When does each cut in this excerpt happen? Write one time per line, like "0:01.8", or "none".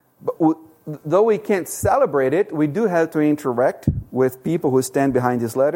none